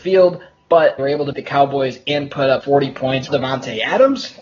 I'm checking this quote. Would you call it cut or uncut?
cut